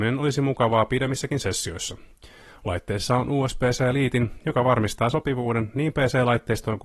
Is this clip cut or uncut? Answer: uncut